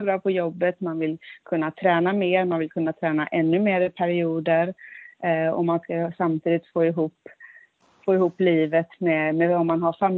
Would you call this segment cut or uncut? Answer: uncut